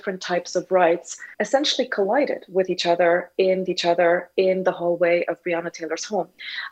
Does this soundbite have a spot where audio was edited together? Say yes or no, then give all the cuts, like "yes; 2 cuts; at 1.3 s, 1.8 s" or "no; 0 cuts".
yes; 2 cuts; at 1.3 s, 3.7 s